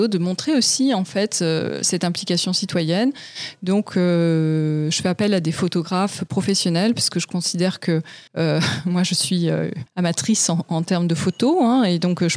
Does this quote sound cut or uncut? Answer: cut